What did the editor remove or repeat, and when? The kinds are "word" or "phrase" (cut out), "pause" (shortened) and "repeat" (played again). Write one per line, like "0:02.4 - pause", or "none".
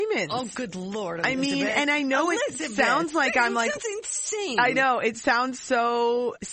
none